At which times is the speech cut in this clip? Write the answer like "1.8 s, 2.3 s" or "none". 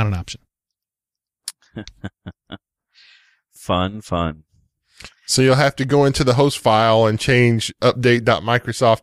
3.6 s